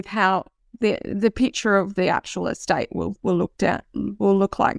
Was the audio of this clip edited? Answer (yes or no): no